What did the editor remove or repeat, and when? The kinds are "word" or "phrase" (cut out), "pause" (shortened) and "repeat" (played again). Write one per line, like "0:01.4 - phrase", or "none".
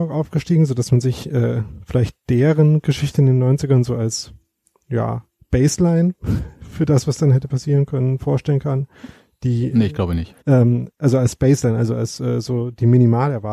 0:10.4 - pause